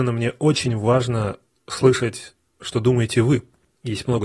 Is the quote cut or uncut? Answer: uncut